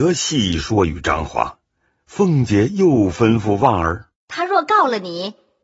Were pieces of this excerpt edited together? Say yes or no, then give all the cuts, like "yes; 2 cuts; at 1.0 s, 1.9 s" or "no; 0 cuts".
no; 0 cuts